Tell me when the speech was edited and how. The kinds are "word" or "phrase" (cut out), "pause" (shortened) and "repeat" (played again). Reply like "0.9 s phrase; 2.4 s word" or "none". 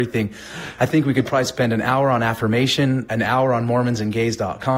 none